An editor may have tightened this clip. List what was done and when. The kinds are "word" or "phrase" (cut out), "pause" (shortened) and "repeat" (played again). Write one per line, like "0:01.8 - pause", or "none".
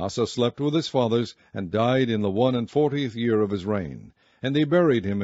none